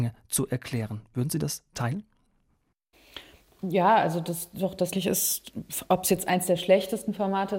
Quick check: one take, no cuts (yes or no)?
no